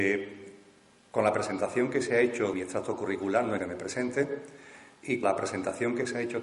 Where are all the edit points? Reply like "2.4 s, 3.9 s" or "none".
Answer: 2.5 s, 3.6 s, 5.2 s